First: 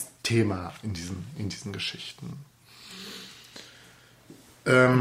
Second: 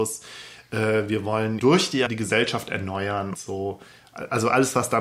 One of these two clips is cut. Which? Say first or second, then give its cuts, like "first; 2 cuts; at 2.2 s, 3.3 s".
second; 3 cuts; at 1.6 s, 2.1 s, 3.3 s